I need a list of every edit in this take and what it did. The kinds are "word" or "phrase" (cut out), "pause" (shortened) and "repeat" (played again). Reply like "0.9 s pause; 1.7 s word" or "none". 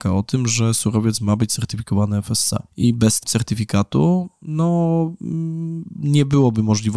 2.7 s pause; 3.2 s word